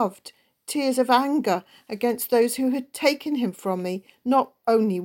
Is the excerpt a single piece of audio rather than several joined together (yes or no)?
yes